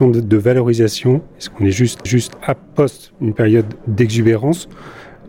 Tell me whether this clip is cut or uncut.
cut